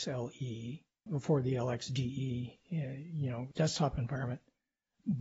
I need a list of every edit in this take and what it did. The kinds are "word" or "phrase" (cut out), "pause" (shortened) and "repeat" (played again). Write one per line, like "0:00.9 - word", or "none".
0:01.1 - word
0:03.5 - word